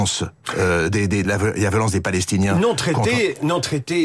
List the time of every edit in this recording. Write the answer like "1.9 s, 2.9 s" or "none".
1.2 s